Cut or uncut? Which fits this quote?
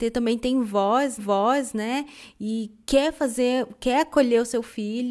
cut